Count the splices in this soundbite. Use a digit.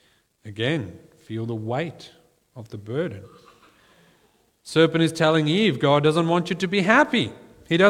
0